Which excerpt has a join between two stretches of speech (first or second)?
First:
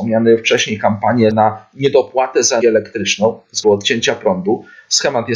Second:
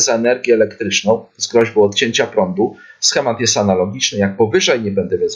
first